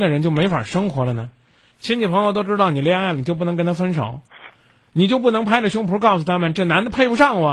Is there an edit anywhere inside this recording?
no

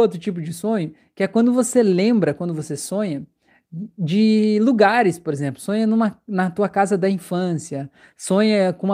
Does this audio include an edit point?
no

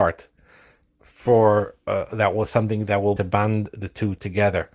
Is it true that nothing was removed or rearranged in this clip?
no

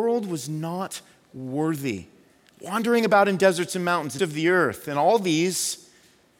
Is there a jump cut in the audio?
yes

